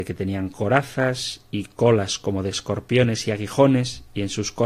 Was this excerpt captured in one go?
yes; 0 cuts

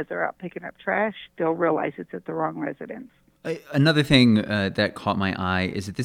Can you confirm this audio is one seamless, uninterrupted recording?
no; 1 cut; at 1.3 s

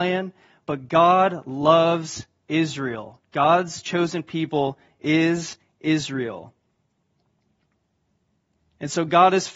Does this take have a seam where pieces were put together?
no; 0 cuts

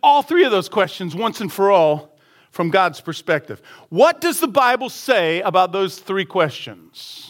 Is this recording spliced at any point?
no; 0 cuts

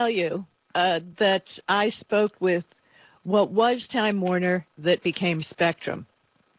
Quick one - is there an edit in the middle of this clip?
no; 0 cuts

